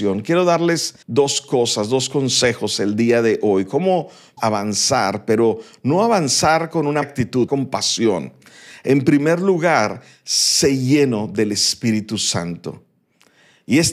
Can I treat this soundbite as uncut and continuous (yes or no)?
no